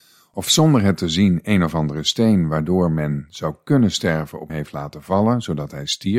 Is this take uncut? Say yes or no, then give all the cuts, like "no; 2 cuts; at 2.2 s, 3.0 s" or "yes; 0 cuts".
no; 1 cut; at 4.5 s